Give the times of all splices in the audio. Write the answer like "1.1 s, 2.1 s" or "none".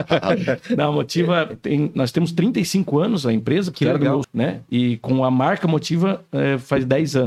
4.2 s